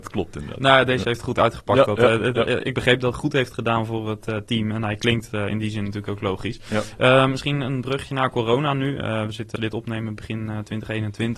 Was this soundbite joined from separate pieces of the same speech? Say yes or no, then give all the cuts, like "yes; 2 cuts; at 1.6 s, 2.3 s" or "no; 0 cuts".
yes; 2 cuts; at 3.1 s, 9.6 s